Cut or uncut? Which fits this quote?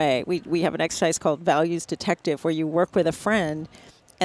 uncut